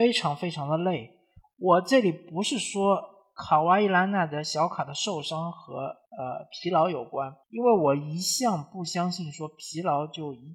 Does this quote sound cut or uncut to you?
cut